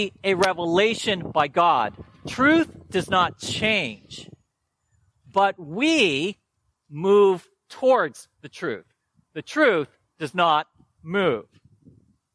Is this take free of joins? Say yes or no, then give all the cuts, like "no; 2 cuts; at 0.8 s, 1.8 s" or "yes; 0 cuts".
yes; 0 cuts